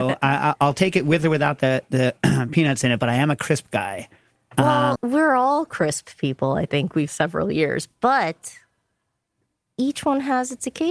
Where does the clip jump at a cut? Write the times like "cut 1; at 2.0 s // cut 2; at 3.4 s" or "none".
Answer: cut 1; at 5.0 s // cut 2; at 7.1 s